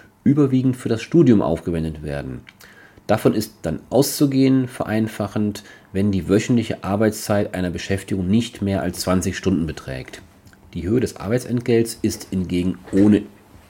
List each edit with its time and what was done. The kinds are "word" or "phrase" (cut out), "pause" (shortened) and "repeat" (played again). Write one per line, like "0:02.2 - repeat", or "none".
none